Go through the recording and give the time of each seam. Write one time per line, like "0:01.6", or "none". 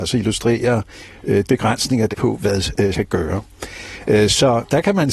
0:01.5
0:02.1
0:02.9